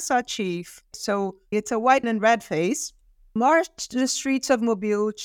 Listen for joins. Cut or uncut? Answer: cut